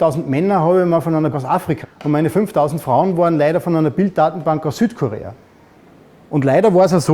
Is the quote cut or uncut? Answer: cut